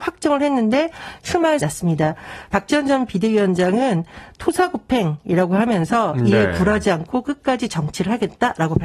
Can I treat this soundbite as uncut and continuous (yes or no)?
no